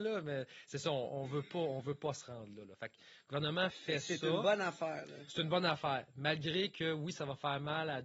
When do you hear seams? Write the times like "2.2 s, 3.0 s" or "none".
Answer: 3.7 s